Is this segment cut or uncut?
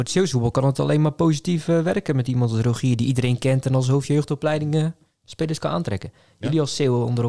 uncut